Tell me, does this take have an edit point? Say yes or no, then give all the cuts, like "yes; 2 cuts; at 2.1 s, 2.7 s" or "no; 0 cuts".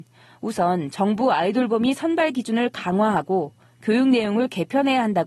no; 0 cuts